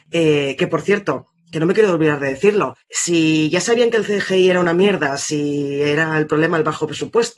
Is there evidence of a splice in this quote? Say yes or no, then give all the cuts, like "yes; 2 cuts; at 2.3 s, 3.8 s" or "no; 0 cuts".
no; 0 cuts